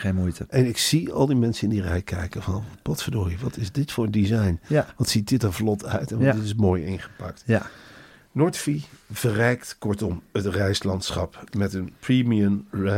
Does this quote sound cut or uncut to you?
uncut